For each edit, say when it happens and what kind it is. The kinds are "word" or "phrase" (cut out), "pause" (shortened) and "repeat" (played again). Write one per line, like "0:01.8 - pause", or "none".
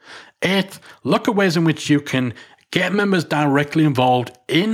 none